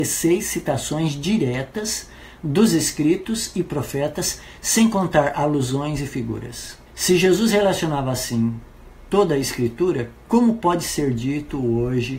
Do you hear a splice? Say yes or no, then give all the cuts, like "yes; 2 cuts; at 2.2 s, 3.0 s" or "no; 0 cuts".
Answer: yes; 1 cut; at 6.9 s